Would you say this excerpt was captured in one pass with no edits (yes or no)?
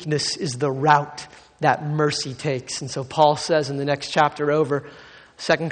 yes